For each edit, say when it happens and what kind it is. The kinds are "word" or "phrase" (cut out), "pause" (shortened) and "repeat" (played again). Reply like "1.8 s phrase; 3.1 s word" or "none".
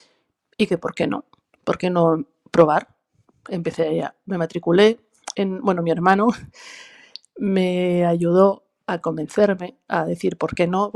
none